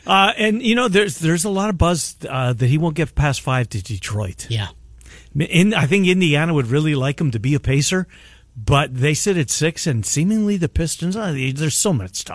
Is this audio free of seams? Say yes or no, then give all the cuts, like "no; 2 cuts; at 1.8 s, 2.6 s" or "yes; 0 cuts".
yes; 0 cuts